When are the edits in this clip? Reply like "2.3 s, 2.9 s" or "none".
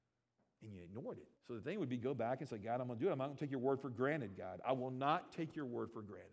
1.4 s